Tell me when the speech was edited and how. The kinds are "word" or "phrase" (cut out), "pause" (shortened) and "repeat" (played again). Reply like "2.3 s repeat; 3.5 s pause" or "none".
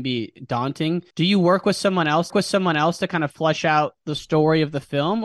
1.1 s pause; 2.3 s repeat